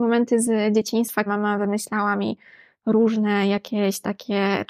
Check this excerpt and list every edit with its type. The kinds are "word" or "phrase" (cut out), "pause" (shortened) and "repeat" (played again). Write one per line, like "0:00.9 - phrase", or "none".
0:01.3 - word